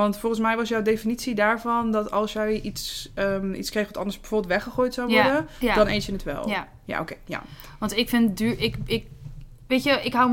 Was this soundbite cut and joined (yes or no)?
no